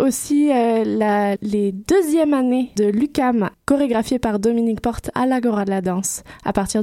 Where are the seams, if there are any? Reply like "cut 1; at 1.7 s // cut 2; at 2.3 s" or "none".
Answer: cut 1; at 1.4 s // cut 2; at 2.8 s // cut 3; at 3.5 s // cut 4; at 5.1 s

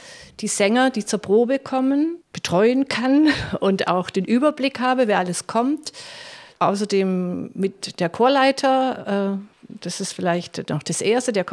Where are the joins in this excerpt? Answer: cut 1; at 9.5 s

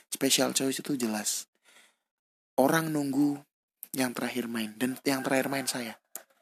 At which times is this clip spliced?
none

